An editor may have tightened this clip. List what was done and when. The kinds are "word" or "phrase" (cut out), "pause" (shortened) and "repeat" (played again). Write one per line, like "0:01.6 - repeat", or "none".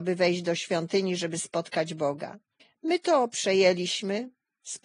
0:02.6 - pause